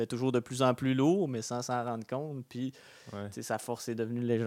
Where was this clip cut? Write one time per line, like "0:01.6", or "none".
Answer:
none